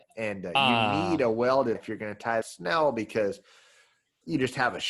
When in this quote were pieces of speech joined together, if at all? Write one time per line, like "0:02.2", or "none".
0:01.8
0:02.4